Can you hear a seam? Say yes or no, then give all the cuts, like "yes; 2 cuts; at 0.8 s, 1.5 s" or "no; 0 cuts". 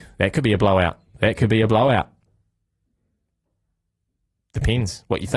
no; 0 cuts